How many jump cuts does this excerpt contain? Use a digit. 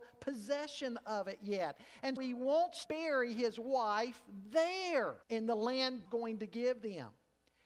4